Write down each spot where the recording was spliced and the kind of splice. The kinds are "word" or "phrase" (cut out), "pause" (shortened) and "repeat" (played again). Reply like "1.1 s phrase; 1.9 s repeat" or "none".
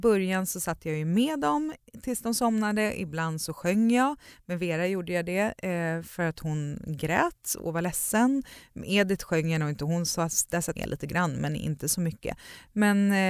10.7 s word

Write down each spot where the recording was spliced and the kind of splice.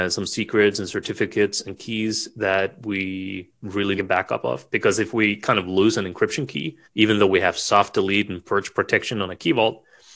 4.0 s phrase; 6.8 s pause

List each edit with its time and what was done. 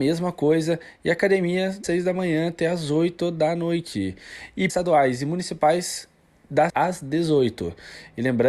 1.8 s word; 4.7 s word; 6.7 s word

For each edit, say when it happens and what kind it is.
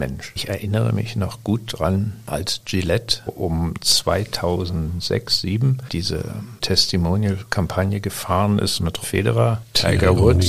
3.3 s word; 6.6 s word; 9.0 s word

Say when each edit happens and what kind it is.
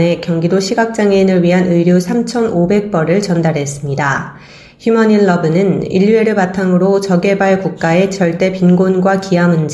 none

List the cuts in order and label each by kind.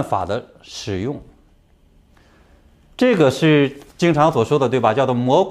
1.5 s pause; 3.9 s pause

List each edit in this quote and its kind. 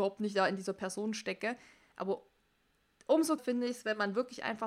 3.4 s word

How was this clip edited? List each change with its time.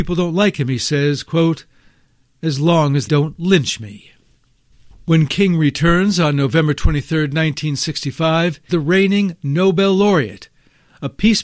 3.1 s word; 8.7 s word

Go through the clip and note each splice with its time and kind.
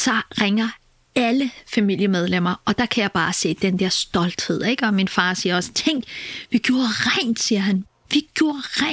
none

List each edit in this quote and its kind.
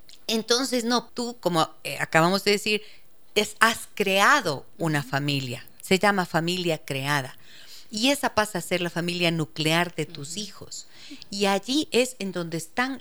1.1 s word

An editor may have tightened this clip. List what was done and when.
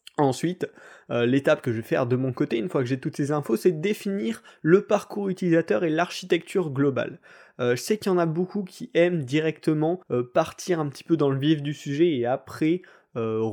10.0 s pause

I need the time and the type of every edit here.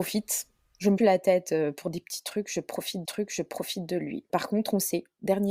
1.0 s phrase; 3.0 s repeat

